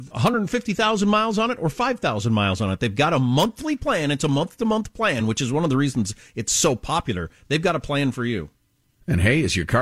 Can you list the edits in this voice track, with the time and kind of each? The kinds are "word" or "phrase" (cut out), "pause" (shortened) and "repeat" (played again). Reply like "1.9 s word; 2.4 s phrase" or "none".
none